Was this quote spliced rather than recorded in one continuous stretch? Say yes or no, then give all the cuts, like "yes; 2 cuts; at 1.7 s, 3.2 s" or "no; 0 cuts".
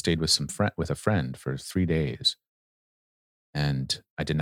no; 0 cuts